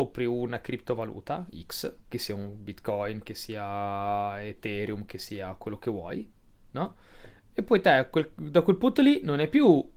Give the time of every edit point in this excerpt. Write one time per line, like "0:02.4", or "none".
none